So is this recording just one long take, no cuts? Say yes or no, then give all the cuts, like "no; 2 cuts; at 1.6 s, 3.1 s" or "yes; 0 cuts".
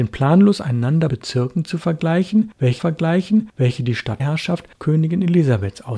no; 3 cuts; at 1.1 s, 2.8 s, 4.2 s